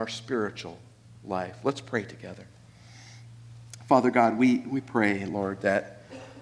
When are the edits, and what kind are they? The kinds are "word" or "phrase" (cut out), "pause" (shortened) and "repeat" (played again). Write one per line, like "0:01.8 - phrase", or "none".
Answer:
none

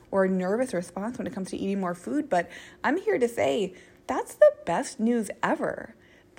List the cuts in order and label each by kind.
0:04.0 - pause

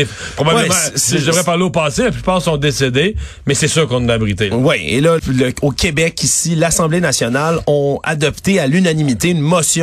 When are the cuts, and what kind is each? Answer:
0:05.2 - word

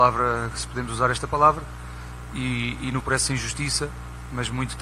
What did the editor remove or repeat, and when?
0:03.0 - phrase

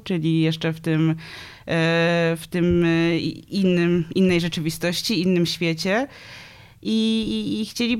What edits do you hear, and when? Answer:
none

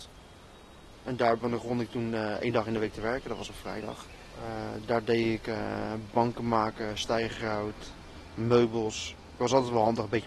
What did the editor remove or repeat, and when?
none

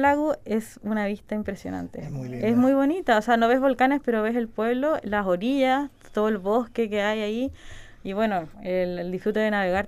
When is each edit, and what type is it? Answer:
0:08.5 - pause

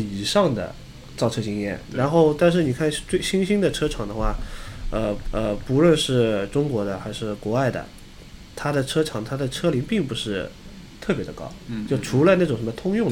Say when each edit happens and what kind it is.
0:01.9 - word
0:05.2 - repeat

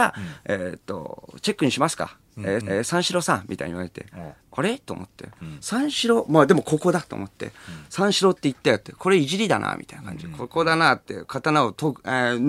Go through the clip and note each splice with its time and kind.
0:02.6 - repeat
0:04.4 - pause

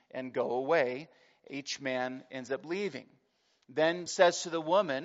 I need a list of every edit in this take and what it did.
0:04.1 - word

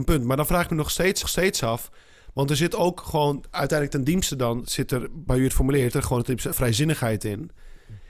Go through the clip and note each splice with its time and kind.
0:01.2 - repeat
0:04.6 - word
0:05.9 - word
0:06.5 - word

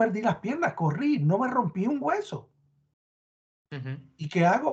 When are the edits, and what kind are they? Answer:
none

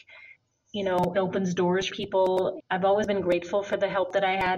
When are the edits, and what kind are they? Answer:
0:01.1 - word
0:01.9 - word
0:02.6 - word

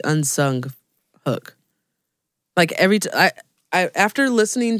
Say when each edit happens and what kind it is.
none

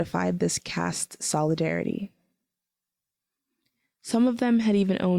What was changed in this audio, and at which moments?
none

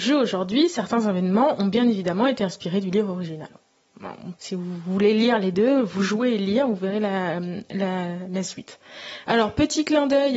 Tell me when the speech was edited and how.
0:04.4 - pause

